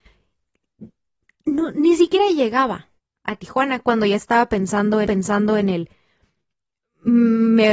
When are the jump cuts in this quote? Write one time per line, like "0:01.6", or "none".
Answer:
0:03.0
0:05.1